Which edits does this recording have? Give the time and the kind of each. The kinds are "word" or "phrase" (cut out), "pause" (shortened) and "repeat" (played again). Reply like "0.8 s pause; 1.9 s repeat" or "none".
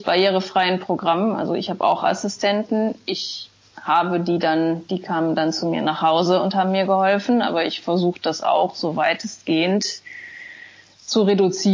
none

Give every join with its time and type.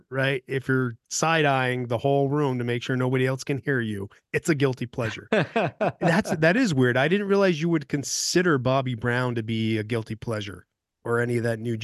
none

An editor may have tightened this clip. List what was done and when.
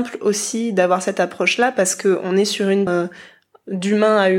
2.9 s word

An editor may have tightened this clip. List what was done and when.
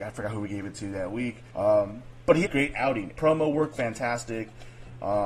1.5 s pause; 2.4 s phrase; 3.1 s word; 3.7 s word

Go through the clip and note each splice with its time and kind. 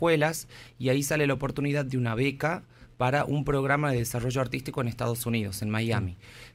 none

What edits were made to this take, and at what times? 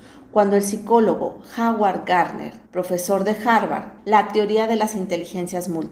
2.6 s pause; 4.0 s word

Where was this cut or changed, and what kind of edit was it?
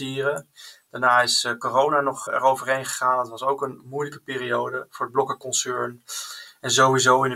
2.3 s word

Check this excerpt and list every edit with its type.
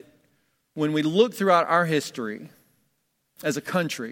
none

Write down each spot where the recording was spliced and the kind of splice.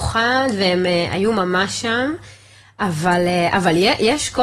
none

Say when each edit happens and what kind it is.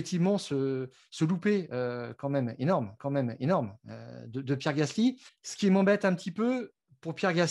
3.0 s repeat; 5.3 s pause

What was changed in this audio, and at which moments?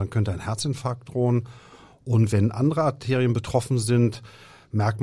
none

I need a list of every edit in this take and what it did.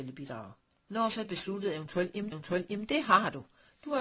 1.2 s phrase; 2.3 s repeat

